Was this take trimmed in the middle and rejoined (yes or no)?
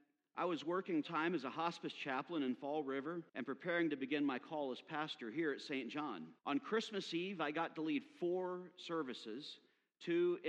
yes